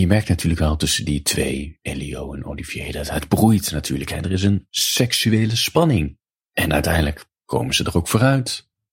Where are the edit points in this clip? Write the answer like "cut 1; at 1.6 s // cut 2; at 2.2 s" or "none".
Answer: cut 1; at 6.3 s // cut 2; at 7.4 s

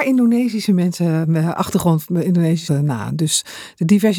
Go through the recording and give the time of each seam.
cut 1; at 2.7 s

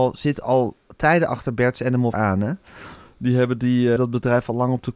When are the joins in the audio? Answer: cut 1; at 2.1 s // cut 2; at 4.0 s

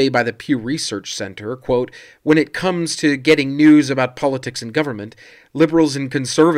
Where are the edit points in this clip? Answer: none

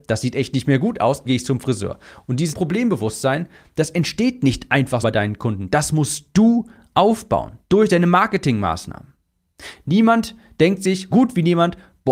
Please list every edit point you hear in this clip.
cut 1; at 1.2 s // cut 2; at 2.5 s // cut 3; at 5.0 s // cut 4; at 11.1 s

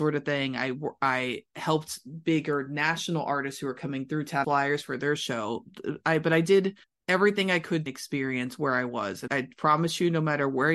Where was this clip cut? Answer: cut 1; at 4.4 s // cut 2; at 6.8 s // cut 3; at 7.9 s // cut 4; at 9.3 s

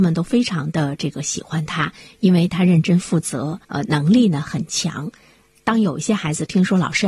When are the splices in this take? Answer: cut 1; at 3.6 s

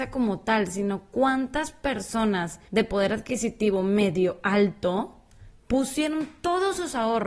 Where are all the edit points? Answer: cut 1; at 2.7 s

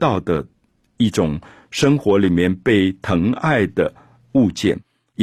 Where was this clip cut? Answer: none

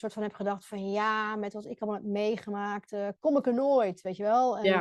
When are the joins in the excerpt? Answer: none

